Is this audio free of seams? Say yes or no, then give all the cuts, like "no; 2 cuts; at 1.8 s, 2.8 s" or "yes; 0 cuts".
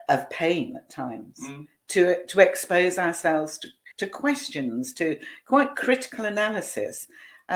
no; 1 cut; at 3.9 s